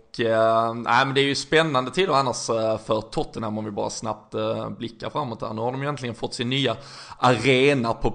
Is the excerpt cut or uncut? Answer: uncut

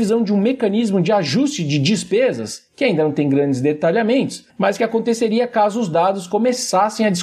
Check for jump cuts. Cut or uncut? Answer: cut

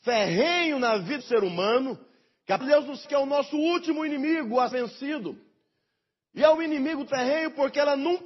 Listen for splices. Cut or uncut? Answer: cut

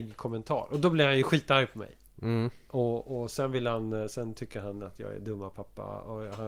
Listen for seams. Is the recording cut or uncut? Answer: uncut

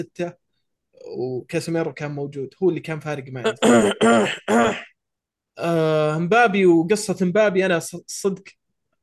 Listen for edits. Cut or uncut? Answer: uncut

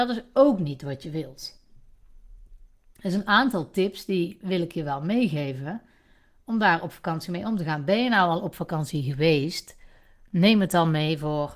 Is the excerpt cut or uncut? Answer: uncut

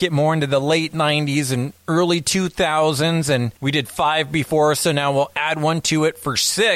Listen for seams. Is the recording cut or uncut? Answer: uncut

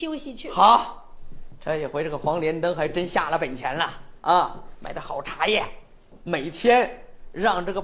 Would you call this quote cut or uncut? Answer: cut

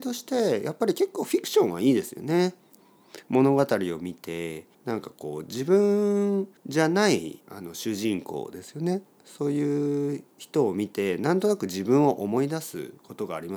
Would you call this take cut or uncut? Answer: cut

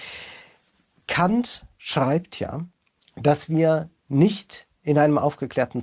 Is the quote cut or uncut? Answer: cut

